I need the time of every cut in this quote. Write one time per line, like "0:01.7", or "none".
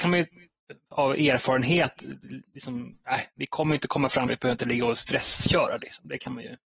0:04.3